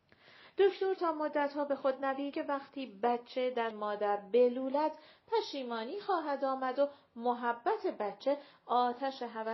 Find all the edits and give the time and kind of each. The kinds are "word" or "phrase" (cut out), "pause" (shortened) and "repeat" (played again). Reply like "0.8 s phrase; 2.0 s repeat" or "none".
2.3 s word; 3.7 s word